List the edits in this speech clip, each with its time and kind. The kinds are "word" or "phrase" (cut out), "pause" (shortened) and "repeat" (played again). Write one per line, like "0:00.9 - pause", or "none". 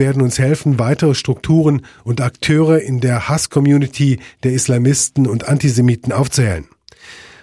none